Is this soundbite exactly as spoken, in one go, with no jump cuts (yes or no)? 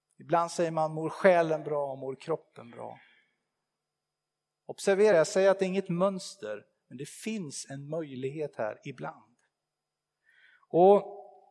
yes